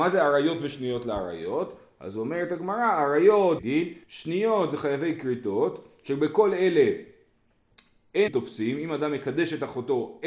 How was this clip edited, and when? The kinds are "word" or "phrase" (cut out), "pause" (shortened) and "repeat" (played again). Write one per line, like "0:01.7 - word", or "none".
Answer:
0:03.6 - phrase
0:04.0 - pause
0:08.3 - word